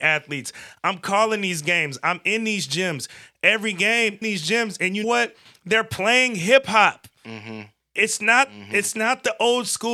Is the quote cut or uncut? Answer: cut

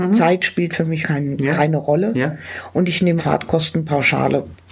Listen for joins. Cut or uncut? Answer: cut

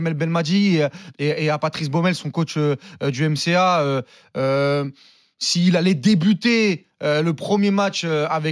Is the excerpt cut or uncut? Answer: uncut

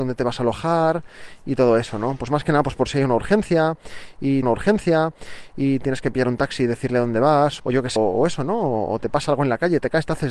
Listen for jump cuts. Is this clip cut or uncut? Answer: cut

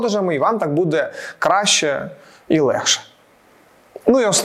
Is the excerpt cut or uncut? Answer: uncut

